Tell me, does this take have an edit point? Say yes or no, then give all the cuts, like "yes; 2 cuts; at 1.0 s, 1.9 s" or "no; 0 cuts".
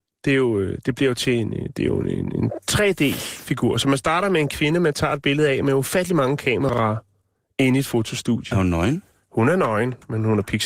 no; 0 cuts